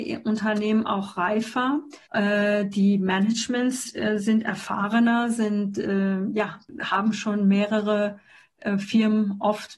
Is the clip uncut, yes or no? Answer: no